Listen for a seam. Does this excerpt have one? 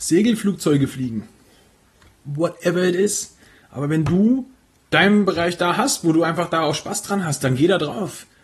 no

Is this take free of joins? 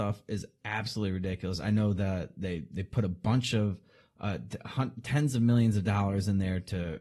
yes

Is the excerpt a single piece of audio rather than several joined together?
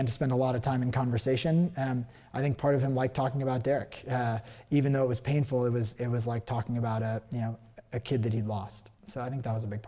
no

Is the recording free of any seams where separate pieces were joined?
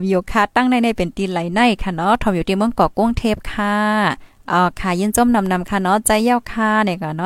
no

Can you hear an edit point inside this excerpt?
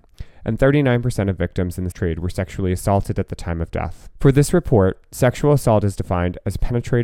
yes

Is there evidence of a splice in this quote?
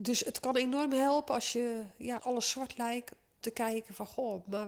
yes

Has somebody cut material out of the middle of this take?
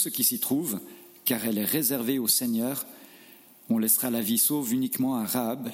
no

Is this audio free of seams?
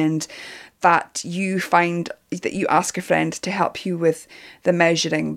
yes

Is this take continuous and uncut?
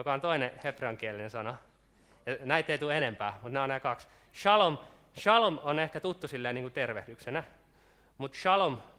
yes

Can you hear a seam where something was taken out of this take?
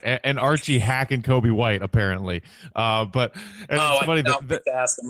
no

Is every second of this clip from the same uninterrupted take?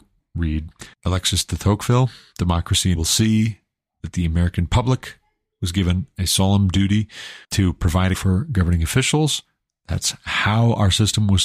no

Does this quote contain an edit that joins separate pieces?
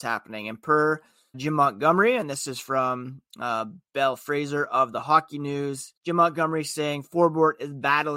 yes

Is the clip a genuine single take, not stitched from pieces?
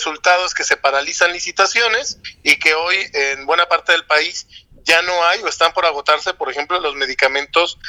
yes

